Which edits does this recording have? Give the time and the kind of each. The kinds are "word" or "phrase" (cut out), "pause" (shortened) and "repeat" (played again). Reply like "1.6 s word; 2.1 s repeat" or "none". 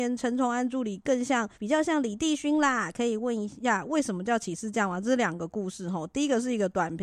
1.5 s pause